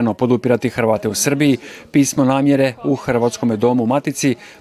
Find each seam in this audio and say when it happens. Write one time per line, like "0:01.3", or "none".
none